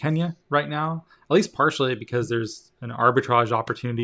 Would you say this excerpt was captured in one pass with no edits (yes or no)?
yes